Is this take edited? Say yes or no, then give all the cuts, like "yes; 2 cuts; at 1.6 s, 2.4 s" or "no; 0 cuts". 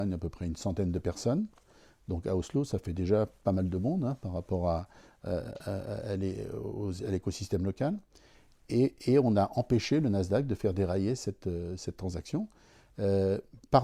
no; 0 cuts